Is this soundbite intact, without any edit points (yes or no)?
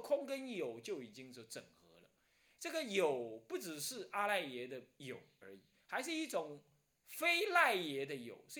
yes